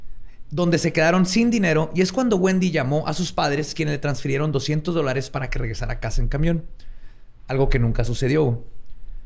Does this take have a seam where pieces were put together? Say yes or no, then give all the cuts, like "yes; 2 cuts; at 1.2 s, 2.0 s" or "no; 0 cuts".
no; 0 cuts